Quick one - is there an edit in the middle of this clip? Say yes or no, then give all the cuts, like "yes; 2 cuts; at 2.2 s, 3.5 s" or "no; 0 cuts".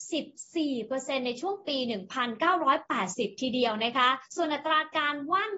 yes; 1 cut; at 4.3 s